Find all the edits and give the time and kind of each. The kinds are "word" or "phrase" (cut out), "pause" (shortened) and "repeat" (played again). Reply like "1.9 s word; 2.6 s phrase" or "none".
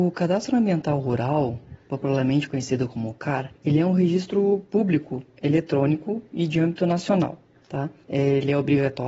3.6 s pause